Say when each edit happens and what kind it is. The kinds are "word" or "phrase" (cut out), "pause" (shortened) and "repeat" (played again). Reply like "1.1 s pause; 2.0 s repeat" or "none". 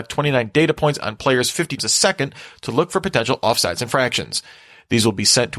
1.8 s word